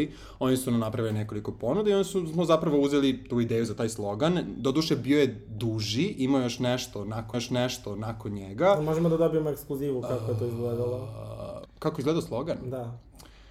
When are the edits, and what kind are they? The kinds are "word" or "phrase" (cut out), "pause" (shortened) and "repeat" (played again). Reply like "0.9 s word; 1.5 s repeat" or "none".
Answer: 7.3 s repeat; 11.7 s word